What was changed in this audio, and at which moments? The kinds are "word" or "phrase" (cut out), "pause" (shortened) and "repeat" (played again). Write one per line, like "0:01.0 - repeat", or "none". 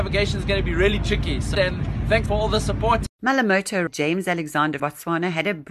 0:01.5 - word
0:02.3 - word
0:03.9 - word
0:04.8 - word